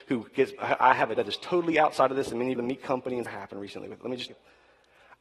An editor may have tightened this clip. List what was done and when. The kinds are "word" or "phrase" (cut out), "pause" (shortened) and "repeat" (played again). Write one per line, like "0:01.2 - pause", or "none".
0:01.2 - word
0:02.6 - phrase
0:03.3 - phrase
0:04.3 - word